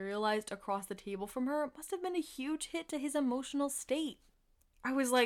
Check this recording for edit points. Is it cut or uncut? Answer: uncut